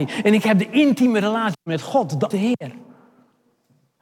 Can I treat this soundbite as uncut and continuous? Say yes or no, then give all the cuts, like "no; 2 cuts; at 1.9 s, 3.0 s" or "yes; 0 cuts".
no; 1 cut; at 2.3 s